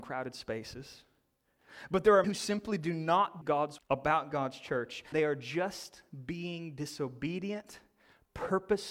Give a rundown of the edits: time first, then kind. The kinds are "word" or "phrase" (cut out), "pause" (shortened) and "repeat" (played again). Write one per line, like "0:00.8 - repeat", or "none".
0:02.2 - word
0:03.4 - word
0:03.8 - word
0:05.1 - word